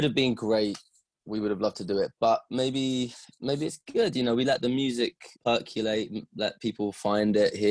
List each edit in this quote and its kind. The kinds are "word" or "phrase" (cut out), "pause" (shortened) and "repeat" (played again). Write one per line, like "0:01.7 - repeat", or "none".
0:05.3 - pause